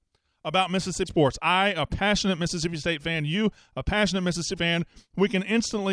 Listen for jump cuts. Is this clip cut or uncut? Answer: cut